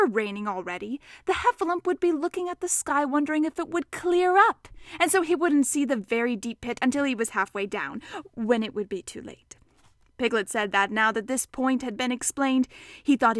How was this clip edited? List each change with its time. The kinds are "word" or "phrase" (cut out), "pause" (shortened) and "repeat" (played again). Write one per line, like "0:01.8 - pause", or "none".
none